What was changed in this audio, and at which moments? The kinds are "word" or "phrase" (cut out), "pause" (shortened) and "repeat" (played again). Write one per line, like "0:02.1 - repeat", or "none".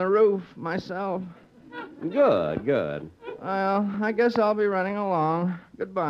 none